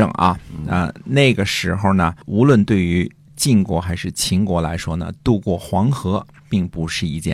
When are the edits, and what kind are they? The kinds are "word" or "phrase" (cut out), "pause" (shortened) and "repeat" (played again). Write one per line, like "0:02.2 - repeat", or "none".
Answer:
0:02.2 - pause

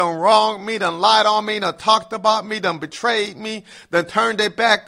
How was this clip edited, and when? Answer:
none

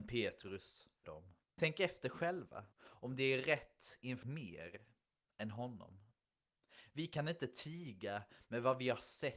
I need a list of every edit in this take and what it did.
0:01.0 - phrase
0:01.4 - pause
0:02.7 - pause
0:04.2 - phrase

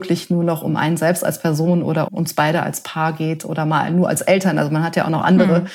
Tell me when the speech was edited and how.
0:02.1 - word

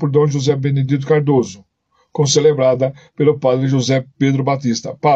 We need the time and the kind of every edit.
none

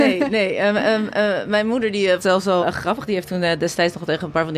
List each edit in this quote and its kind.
0:02.2 - phrase
0:02.6 - word

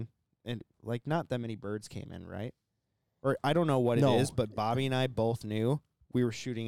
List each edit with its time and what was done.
none

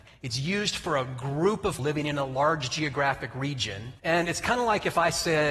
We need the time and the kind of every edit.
0:01.8 - word
0:04.0 - pause

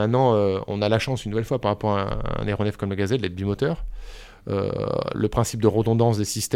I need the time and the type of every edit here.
none

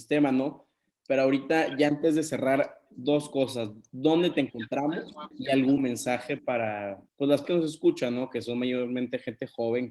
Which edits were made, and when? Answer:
0:05.3 - pause
0:05.8 - word
0:07.1 - pause
0:07.4 - word

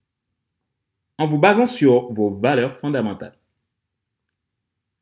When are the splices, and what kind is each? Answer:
none

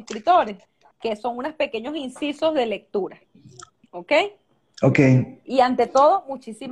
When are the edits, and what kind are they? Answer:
none

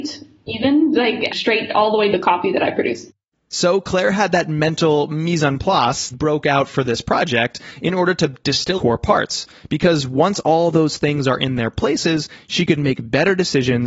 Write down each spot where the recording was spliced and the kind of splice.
0:01.3 - word
0:02.1 - phrase
0:06.1 - phrase
0:08.8 - phrase

